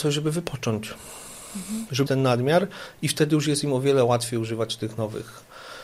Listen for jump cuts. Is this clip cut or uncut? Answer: cut